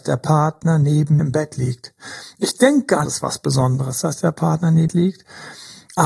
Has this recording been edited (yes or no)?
yes